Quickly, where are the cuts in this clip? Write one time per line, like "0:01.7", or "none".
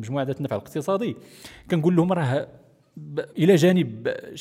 0:03.3